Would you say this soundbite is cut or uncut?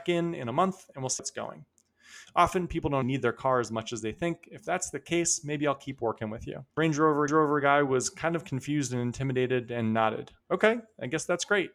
cut